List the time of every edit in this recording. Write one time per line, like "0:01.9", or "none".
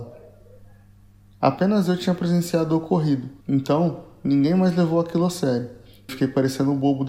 0:03.4
0:06.1